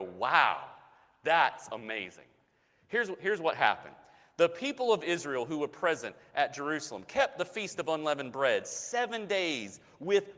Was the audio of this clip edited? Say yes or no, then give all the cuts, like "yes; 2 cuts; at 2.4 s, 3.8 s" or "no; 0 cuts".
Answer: no; 0 cuts